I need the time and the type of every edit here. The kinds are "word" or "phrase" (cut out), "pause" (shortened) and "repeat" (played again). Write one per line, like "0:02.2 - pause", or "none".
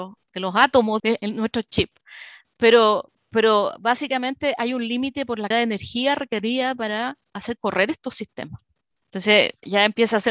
0:01.0 - word
0:05.5 - word